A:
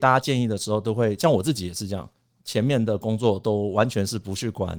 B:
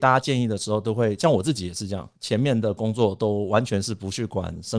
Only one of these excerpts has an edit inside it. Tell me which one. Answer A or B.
B